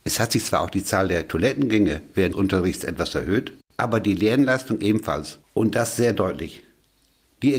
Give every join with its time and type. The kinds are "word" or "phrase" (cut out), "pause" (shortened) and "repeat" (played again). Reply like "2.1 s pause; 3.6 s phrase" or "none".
2.3 s word; 3.6 s pause; 5.4 s pause